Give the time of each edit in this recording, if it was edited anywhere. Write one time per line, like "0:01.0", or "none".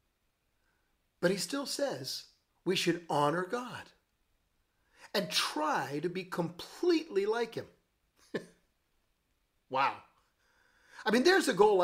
0:02.5